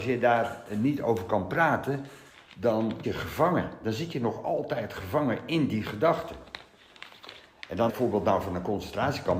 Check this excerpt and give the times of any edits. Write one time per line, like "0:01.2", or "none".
0:03.0
0:07.9